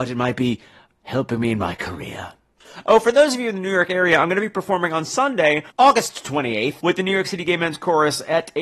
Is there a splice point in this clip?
no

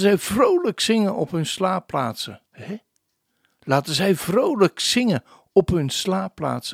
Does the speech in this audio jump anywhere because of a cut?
yes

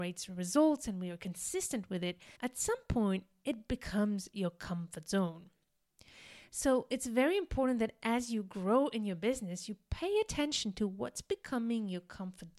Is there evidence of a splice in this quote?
yes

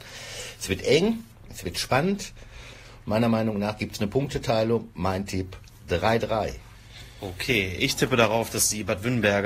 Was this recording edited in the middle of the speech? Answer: no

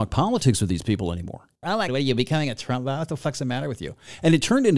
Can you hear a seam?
yes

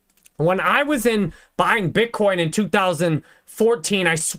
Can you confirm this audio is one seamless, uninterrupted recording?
yes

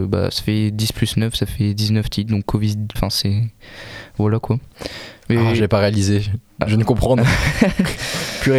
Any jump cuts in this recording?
yes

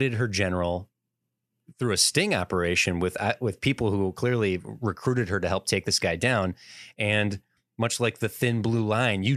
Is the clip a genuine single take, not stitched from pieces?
yes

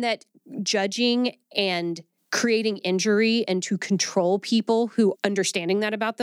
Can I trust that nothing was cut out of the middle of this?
no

